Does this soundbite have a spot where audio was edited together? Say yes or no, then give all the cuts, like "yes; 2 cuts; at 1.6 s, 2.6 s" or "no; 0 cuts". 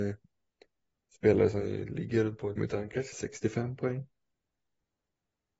yes; 2 cuts; at 2.6 s, 3.1 s